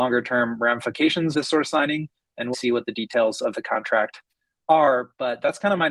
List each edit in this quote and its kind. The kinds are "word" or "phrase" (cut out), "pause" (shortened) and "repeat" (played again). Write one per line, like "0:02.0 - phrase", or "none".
0:01.3 - word
0:02.5 - word